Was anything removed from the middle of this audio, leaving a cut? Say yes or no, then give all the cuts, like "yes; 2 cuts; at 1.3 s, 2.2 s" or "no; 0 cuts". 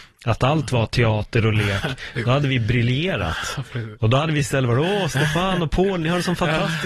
no; 0 cuts